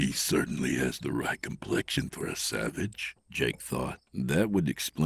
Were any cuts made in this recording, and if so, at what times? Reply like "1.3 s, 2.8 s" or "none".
4.1 s